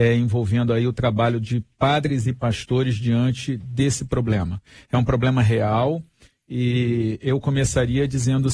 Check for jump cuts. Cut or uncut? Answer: uncut